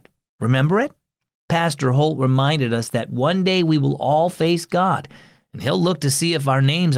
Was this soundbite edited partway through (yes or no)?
no